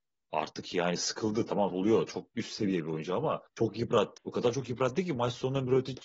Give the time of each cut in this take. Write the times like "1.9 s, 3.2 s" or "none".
1.7 s, 2.3 s, 3.5 s, 4.2 s